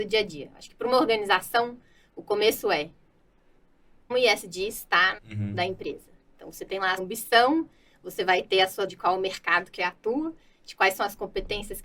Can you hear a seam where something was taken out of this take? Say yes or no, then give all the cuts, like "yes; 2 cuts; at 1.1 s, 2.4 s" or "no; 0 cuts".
yes; 5 cuts; at 4.1 s, 5.2 s, 7.0 s, 8.9 s, 9.8 s